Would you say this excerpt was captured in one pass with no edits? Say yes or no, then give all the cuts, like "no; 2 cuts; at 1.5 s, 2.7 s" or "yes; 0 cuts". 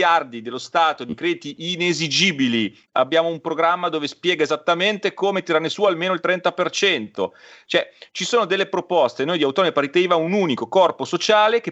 yes; 0 cuts